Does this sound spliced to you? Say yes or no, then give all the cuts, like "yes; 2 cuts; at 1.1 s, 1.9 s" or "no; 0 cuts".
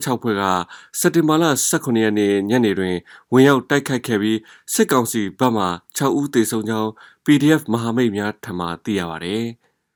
no; 0 cuts